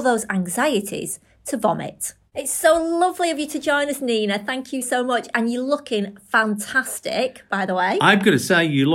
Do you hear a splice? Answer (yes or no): yes